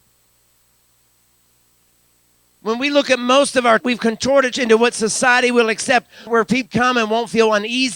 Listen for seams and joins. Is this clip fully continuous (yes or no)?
no